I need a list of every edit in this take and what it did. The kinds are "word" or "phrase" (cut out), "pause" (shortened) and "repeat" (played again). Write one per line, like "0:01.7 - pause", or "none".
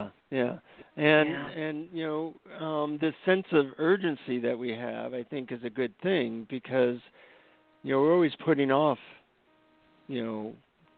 none